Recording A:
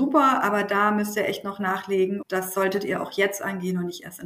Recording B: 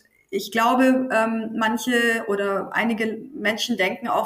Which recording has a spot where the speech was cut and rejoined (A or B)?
A